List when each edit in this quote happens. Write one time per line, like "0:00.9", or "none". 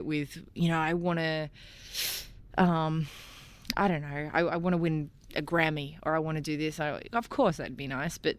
none